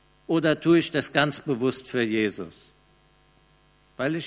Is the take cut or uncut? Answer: uncut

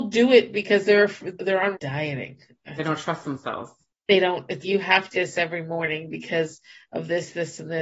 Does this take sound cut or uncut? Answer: cut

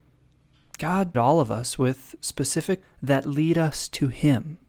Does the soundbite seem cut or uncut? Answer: cut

